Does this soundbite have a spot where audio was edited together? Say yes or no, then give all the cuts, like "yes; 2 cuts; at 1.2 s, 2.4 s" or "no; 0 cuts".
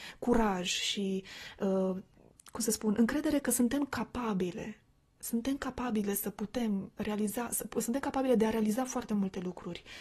no; 0 cuts